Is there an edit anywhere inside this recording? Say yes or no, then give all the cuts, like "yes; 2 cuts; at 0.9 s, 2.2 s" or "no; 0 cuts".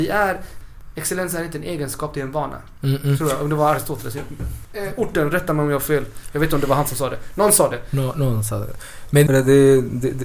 yes; 1 cut; at 9.3 s